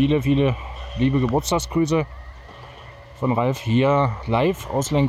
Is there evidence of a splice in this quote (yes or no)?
no